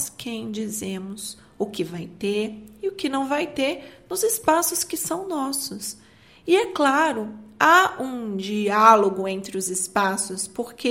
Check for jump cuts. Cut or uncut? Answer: uncut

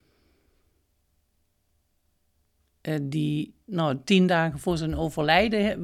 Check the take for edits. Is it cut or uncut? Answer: uncut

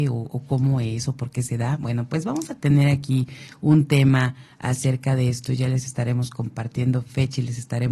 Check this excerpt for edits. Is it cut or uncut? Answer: uncut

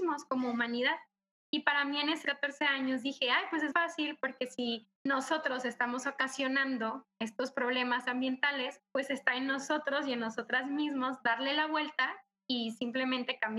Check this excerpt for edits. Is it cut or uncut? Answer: cut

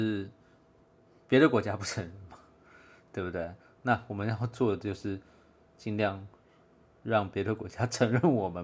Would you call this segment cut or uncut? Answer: uncut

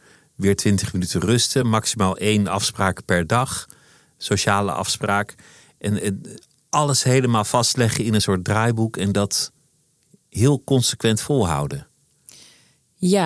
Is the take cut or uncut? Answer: uncut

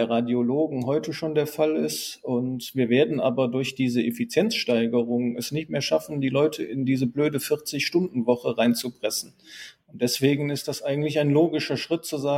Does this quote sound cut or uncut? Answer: uncut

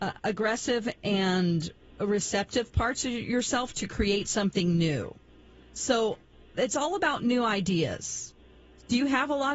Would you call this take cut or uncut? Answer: uncut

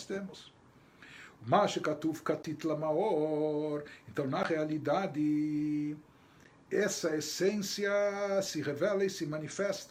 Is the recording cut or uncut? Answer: uncut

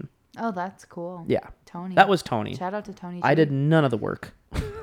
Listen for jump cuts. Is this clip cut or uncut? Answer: cut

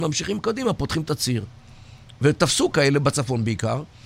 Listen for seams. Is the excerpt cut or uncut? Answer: cut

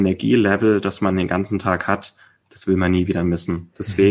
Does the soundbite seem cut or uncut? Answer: uncut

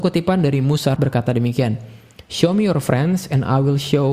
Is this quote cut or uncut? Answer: cut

